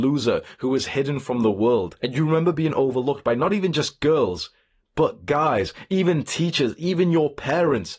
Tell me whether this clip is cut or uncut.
uncut